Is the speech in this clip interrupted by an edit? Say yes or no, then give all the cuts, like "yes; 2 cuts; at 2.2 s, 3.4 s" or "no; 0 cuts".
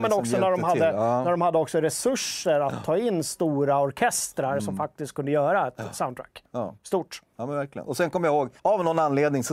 yes; 2 cuts; at 6.8 s, 8.6 s